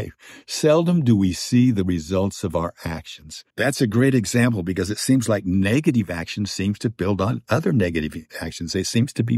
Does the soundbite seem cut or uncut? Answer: cut